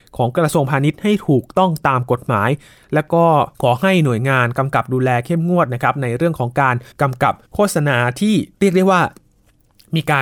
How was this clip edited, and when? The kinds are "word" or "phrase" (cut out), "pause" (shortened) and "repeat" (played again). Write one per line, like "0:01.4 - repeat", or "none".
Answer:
0:03.5 - pause
0:06.9 - pause
0:07.4 - pause
0:08.5 - pause